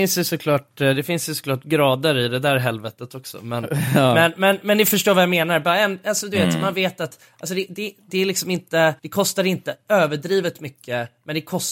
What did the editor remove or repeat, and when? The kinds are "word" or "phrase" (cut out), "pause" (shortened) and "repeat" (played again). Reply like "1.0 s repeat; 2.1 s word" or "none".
9.0 s pause